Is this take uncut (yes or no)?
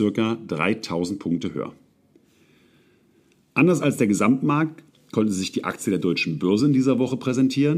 yes